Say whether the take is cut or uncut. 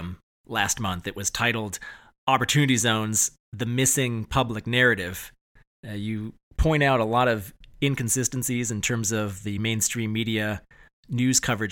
uncut